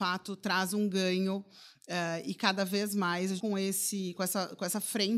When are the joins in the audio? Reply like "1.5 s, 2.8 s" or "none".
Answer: 3.4 s